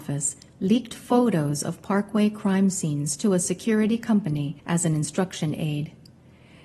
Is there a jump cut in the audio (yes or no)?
yes